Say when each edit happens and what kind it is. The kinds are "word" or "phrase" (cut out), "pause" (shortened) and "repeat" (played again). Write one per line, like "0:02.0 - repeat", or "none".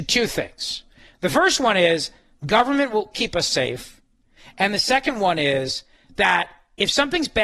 0:03.1 - word

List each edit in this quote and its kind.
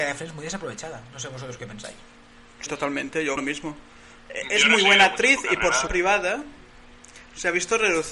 0:02.7 - word
0:03.4 - word
0:05.9 - word

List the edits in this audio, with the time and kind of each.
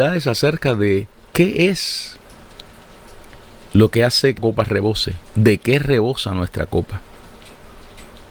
0:04.4 - word

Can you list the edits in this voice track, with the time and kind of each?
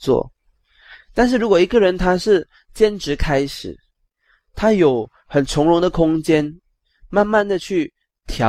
none

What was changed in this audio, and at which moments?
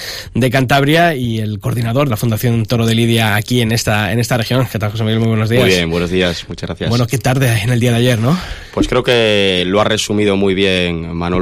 0:02.1 - phrase

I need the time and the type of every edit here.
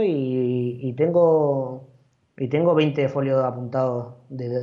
none

